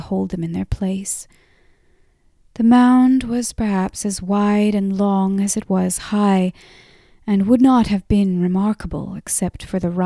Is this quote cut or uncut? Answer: uncut